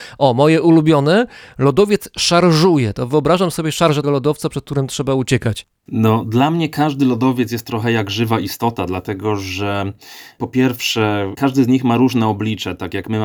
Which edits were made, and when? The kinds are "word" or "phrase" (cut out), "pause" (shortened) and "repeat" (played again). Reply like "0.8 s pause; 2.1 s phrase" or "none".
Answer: 4.0 s word